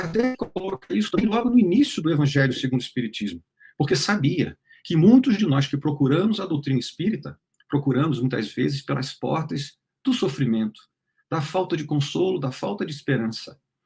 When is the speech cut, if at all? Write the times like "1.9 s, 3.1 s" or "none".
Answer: none